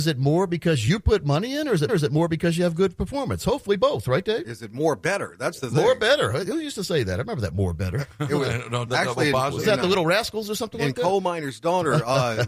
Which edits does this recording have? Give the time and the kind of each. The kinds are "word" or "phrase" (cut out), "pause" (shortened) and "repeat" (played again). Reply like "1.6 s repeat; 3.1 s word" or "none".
1.9 s repeat; 8.9 s word